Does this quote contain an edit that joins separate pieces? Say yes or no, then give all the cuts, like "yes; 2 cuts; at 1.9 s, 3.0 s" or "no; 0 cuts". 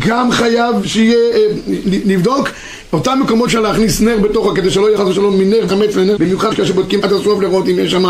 yes; 6 cuts; at 3.5 s, 5.0 s, 5.7 s, 6.2 s, 6.5 s, 7.0 s